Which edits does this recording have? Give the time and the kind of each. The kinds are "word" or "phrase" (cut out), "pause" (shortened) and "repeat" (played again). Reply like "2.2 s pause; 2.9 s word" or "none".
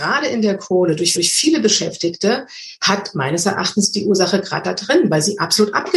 1.1 s repeat

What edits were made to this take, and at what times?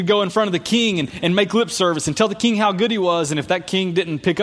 none

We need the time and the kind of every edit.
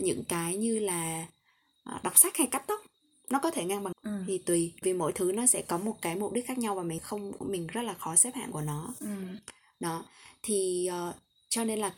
3.9 s word; 4.8 s word; 7.0 s word

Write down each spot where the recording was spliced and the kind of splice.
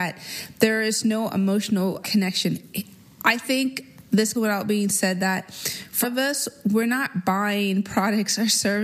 2.0 s word; 4.3 s word; 6.0 s phrase

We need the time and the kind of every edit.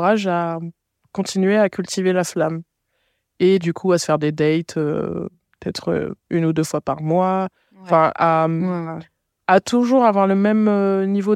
none

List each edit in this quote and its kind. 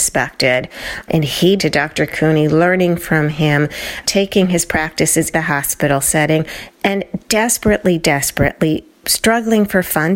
1.6 s phrase; 5.3 s word

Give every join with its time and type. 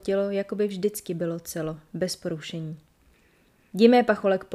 none

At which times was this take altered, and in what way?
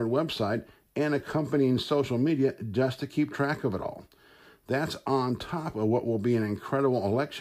none

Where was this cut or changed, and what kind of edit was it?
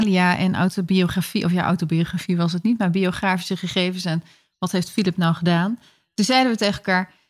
none

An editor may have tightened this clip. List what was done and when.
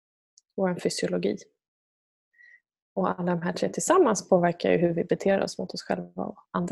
none

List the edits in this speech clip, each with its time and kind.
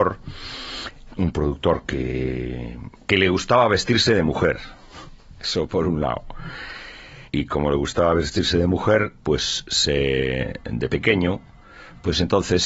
7.3 s pause

